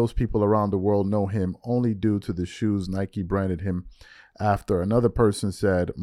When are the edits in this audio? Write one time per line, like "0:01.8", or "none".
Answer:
none